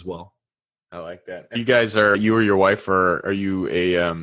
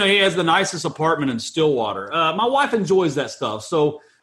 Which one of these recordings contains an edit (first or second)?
first